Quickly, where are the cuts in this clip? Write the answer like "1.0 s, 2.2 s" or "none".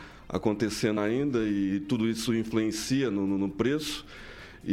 1.0 s